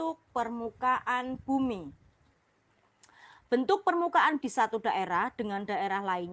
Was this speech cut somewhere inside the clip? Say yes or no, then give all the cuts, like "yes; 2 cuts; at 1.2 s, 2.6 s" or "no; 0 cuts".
yes; 1 cut; at 4.4 s